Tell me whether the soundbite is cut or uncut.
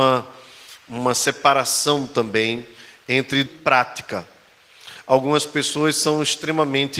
cut